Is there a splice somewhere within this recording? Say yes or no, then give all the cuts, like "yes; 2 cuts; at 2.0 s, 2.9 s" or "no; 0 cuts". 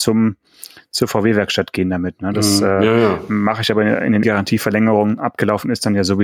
yes; 1 cut; at 4.2 s